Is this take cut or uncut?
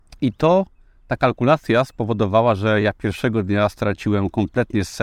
uncut